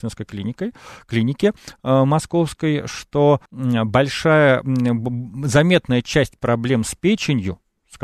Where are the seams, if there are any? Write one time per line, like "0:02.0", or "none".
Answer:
0:03.5